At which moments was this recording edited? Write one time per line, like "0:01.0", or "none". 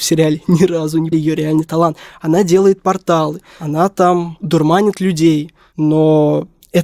0:01.1